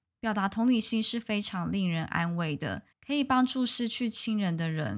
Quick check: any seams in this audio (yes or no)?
yes